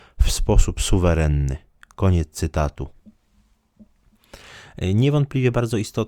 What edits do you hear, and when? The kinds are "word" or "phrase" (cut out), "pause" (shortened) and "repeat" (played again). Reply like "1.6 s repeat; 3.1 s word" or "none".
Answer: none

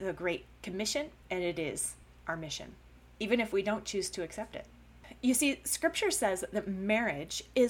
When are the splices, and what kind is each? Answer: none

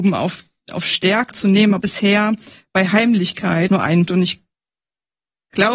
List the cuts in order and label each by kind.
1.3 s phrase; 1.8 s phrase; 3.7 s word; 4.1 s word

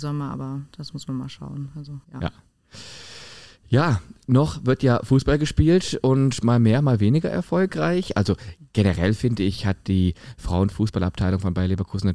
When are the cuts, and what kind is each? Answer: 2.0 s pause

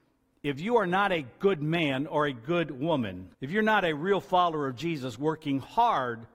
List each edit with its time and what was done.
3.3 s pause

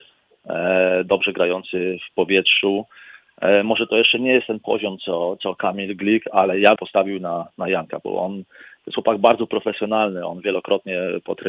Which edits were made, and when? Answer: 6.8 s phrase

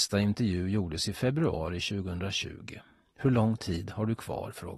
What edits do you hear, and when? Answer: none

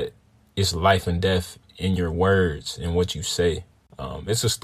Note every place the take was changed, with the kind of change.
none

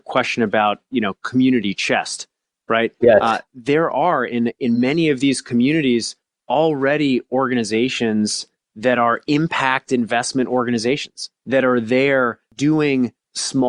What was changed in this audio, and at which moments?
none

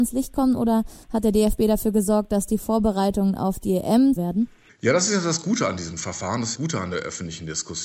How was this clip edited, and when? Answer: 1.0 s pause; 4.2 s phrase; 6.5 s phrase

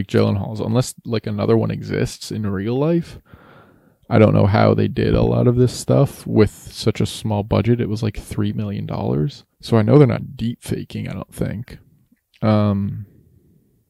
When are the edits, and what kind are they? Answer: 9.5 s pause

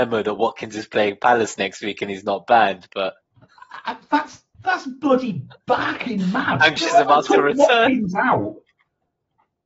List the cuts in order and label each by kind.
3.2 s word; 4.5 s word; 6.8 s word

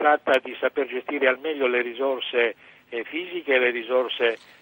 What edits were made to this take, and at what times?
none

